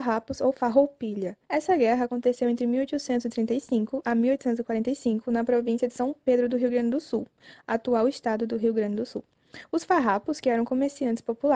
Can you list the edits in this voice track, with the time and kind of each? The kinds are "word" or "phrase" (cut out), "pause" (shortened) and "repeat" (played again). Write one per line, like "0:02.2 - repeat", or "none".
0:01.4 - pause